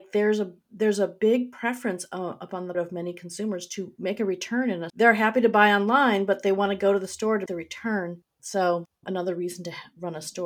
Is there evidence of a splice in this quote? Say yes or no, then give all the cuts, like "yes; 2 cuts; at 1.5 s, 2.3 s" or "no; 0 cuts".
yes; 3 cuts; at 2.7 s, 4.9 s, 7.5 s